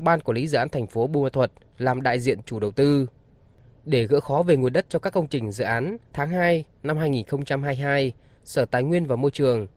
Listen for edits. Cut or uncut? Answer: cut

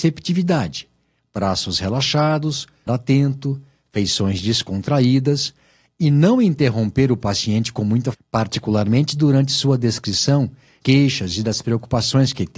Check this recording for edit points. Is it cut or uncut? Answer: cut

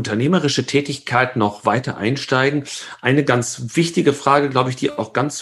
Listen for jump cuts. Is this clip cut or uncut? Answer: uncut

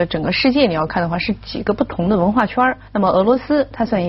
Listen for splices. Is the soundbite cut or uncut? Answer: cut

